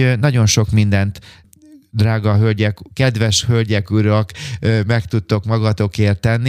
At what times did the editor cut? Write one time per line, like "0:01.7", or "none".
none